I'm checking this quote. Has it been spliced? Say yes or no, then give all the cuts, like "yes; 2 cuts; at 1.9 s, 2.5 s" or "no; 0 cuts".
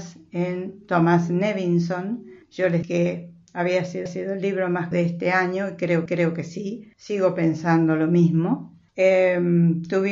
yes; 7 cuts; at 2.4 s, 2.8 s, 4.1 s, 4.9 s, 6.1 s, 6.9 s, 8.9 s